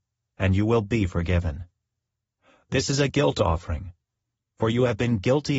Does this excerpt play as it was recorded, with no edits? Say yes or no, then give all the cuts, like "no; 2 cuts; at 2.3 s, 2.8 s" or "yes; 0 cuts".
yes; 0 cuts